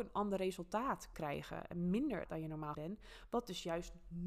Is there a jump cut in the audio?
yes; 3 cuts; at 1.1 s, 2.3 s, 2.7 s

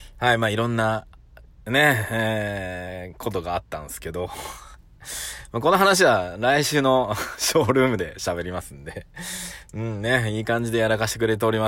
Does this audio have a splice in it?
no; 0 cuts

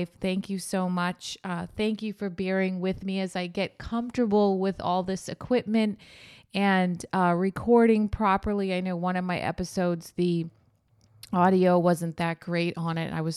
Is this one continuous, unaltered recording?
yes; 0 cuts

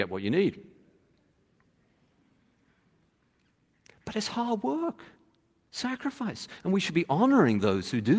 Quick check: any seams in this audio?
no; 0 cuts

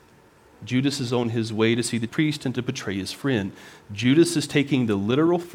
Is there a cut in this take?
yes; 1 cut; at 2.1 s

